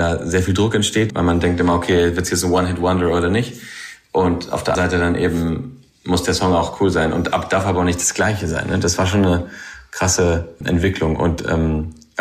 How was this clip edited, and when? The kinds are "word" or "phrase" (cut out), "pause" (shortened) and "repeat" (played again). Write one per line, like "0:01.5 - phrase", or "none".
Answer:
0:01.1 - word
0:04.7 - word